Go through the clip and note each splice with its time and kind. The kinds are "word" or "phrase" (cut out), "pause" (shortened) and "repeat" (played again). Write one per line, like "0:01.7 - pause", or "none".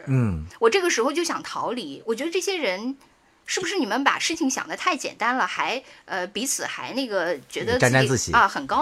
none